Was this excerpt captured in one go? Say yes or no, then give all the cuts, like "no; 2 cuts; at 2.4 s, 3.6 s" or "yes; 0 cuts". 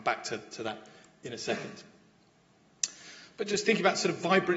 yes; 0 cuts